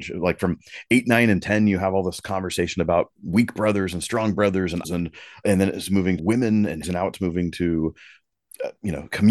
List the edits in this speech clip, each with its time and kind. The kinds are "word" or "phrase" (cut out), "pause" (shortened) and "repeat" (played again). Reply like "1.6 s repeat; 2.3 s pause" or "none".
3.2 s pause; 4.8 s word; 5.4 s word; 6.2 s word; 6.8 s phrase